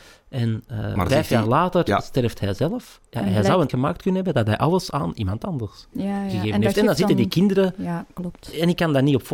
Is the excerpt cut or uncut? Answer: cut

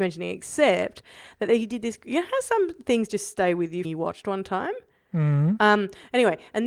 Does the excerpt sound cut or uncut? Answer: cut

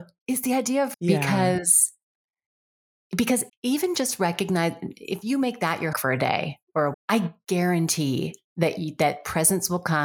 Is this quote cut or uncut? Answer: cut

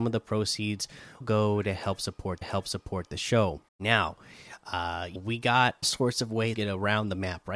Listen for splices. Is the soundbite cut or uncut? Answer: cut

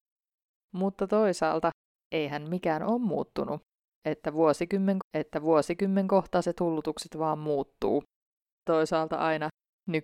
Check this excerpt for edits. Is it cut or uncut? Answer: cut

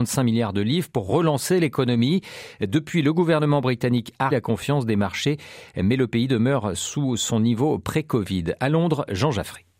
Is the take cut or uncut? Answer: cut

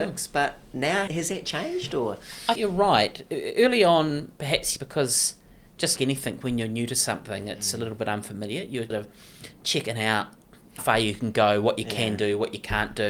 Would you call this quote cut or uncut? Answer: cut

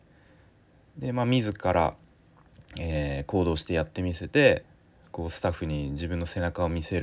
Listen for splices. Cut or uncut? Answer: uncut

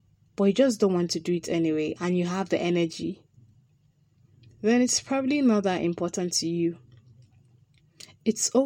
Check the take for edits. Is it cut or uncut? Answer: uncut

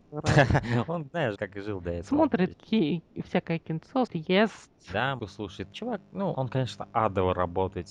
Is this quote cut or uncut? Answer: cut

